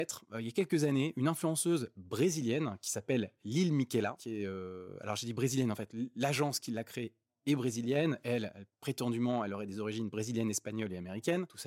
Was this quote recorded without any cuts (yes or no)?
yes